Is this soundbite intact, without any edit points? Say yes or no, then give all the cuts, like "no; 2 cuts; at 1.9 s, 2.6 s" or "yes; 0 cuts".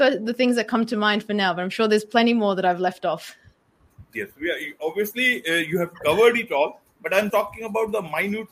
no; 2 cuts; at 4.1 s, 7.3 s